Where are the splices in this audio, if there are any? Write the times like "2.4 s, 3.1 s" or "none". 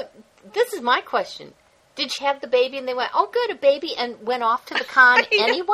2.2 s